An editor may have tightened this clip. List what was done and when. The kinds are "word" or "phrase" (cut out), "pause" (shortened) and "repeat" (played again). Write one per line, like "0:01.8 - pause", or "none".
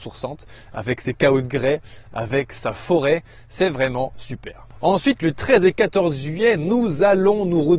none